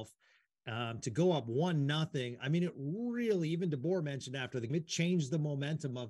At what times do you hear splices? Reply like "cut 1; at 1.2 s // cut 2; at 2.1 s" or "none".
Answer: cut 1; at 4.7 s